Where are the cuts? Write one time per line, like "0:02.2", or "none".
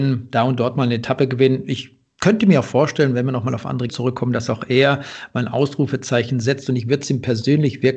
0:03.9